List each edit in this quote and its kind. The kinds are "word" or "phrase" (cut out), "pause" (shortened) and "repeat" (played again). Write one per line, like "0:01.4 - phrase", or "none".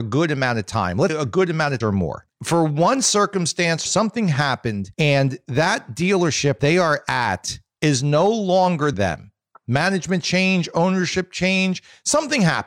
0:01.1 - word
0:01.8 - phrase
0:03.9 - phrase
0:04.9 - pause
0:06.6 - word
0:08.9 - phrase